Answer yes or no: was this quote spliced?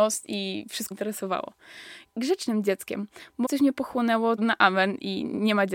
yes